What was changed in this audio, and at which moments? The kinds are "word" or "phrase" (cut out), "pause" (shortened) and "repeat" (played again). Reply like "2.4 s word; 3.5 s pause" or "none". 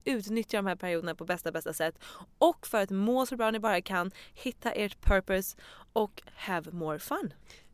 none